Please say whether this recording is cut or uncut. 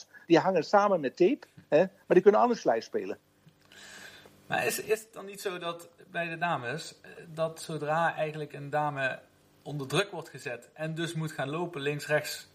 uncut